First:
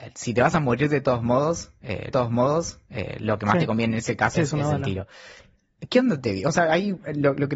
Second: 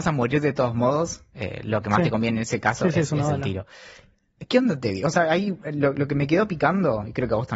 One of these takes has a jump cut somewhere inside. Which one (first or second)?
first